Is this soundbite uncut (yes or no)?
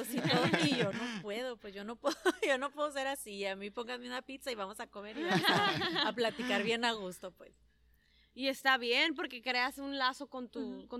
yes